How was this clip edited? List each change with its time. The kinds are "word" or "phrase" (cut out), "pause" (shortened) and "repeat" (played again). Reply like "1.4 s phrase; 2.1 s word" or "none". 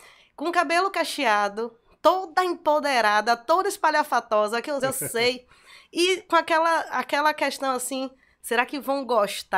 4.8 s phrase